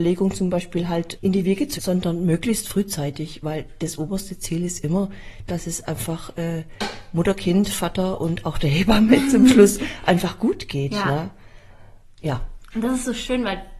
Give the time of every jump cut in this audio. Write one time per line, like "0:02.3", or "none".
0:01.2
0:01.8